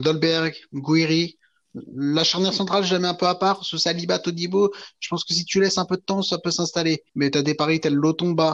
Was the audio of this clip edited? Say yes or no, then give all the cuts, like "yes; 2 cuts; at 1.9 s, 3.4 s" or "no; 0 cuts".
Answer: yes; 1 cut; at 7.1 s